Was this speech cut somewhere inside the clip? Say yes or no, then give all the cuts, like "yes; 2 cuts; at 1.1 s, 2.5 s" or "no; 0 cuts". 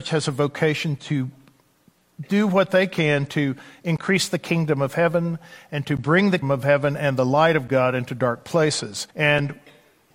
yes; 2 cuts; at 6.4 s, 9.1 s